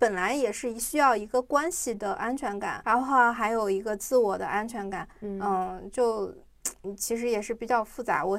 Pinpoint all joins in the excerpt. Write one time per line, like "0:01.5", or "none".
0:02.8
0:05.1

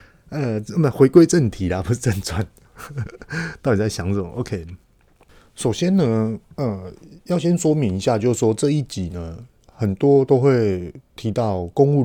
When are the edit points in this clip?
none

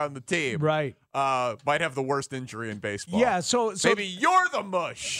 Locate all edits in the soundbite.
none

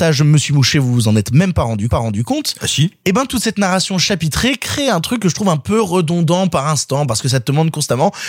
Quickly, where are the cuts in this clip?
0:01.9

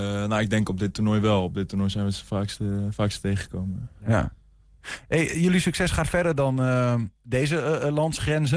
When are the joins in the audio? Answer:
0:07.2

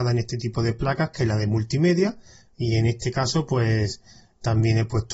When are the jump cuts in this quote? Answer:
none

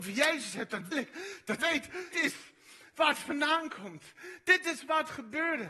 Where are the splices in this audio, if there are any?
0:00.9
0:01.6
0:02.1

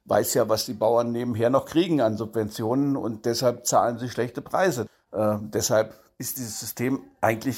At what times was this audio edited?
none

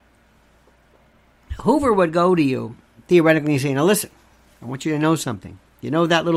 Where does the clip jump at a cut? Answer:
none

